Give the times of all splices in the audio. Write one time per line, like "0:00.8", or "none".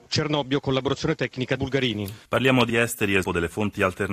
0:01.6
0:02.2
0:02.7
0:03.2